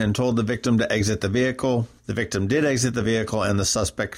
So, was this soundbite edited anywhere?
no; 0 cuts

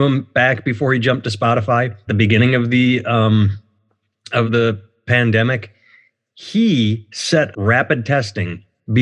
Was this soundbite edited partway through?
yes; 3 cuts; at 2.1 s, 4.5 s, 7.5 s

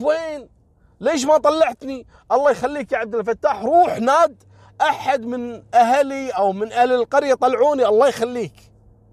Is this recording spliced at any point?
no; 0 cuts

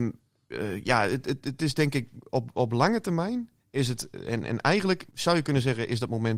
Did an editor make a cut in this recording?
yes; 1 cut; at 5.1 s

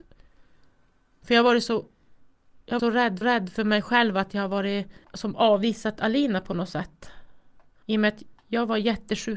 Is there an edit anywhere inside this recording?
yes; 4 cuts; at 2.8 s, 3.2 s, 5.0 s, 7.8 s

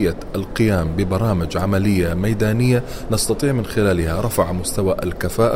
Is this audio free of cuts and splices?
yes; 0 cuts

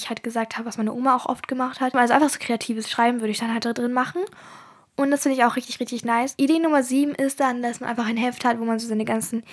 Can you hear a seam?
no; 0 cuts

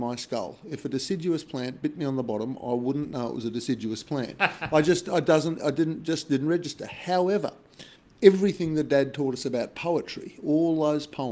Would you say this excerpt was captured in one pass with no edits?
no; 1 cut; at 8.0 s

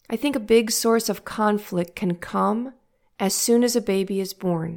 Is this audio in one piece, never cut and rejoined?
yes; 0 cuts

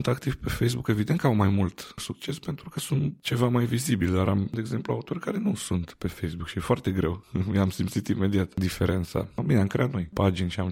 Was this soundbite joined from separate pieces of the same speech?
no; 0 cuts

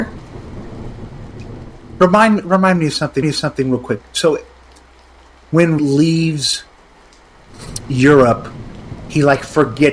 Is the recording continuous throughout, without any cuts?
no; 2 cuts; at 3.2 s, 5.8 s

